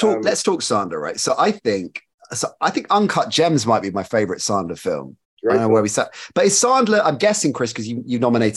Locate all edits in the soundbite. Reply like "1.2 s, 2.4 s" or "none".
2.1 s, 5.2 s